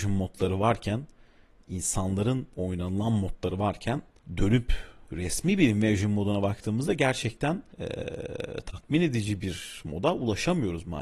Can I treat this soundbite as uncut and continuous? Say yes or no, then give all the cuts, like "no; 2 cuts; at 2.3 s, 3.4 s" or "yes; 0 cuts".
no; 3 cuts; at 2.5 s, 4.2 s, 7.7 s